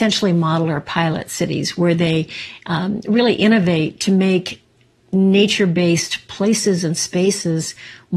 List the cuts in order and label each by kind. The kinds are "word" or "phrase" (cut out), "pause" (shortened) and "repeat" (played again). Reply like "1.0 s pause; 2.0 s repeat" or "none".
none